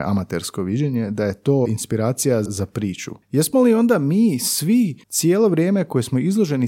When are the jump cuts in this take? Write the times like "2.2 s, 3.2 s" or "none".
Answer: 1.7 s, 2.5 s, 3.2 s, 5.0 s